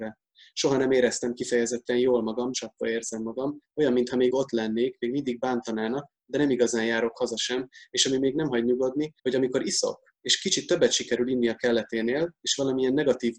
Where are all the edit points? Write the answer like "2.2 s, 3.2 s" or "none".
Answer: 2.5 s, 4.3 s, 9.2 s, 10.2 s